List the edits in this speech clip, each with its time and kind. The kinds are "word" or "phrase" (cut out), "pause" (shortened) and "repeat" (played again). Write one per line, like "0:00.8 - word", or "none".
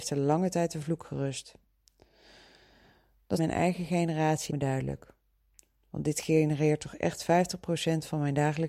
0:03.4 - phrase
0:04.5 - word